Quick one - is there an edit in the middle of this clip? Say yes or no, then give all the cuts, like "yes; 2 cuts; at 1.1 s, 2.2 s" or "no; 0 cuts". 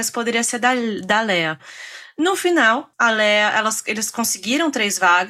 no; 0 cuts